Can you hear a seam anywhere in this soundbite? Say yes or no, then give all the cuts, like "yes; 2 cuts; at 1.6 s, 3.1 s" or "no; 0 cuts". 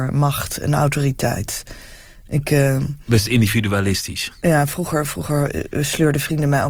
no; 0 cuts